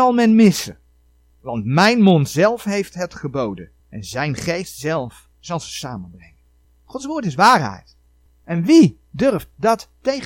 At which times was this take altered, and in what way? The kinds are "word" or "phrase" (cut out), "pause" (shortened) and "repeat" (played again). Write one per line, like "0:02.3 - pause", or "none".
0:03.8 - pause
0:05.3 - pause
0:06.6 - pause
0:08.3 - pause